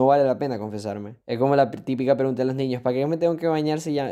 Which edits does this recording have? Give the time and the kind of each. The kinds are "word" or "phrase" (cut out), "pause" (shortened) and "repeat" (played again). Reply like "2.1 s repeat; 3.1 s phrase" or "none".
1.2 s pause